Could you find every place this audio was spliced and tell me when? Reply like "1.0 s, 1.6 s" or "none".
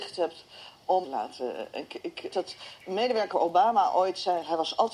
1.0 s, 2.3 s, 3.3 s